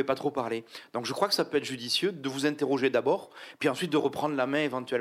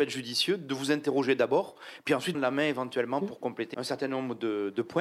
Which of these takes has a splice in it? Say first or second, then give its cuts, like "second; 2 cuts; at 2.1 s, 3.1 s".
second; 2 cuts; at 2.3 s, 3.7 s